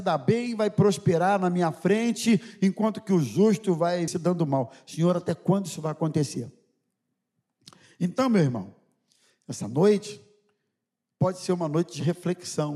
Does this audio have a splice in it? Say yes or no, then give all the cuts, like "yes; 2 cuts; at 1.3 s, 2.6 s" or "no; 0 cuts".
yes; 1 cut; at 4.1 s